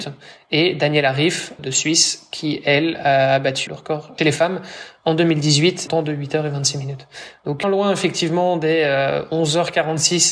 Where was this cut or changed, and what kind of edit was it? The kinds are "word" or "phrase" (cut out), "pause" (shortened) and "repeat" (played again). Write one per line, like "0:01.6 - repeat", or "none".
0:01.6 - word
0:03.7 - word
0:04.2 - word
0:05.9 - phrase
0:07.6 - phrase